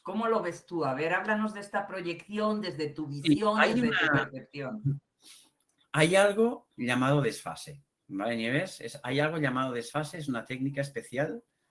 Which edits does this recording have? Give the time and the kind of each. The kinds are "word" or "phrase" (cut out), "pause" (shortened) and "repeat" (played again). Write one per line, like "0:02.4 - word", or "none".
none

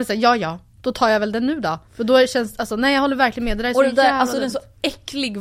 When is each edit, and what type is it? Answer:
0:01.9 - pause

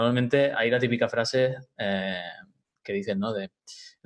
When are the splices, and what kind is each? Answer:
none

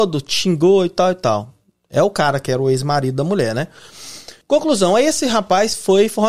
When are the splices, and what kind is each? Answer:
0:04.4 - pause

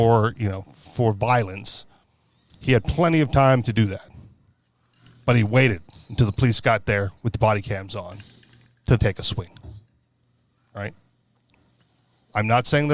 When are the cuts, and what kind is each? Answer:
0:09.0 - word

